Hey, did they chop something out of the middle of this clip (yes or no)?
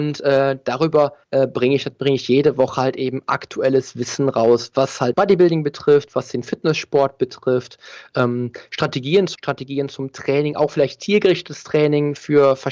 yes